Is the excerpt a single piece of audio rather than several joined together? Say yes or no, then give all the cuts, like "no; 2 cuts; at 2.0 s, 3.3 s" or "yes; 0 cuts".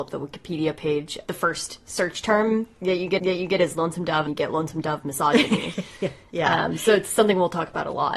no; 2 cuts; at 3.2 s, 4.3 s